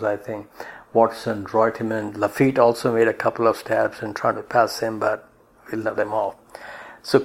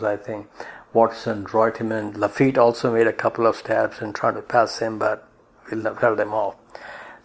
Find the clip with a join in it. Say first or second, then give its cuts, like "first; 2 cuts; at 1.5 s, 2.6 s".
first; 1 cut; at 6.0 s